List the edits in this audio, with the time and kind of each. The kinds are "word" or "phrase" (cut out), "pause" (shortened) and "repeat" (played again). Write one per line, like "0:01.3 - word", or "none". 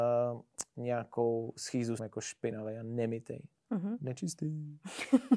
0:02.0 - phrase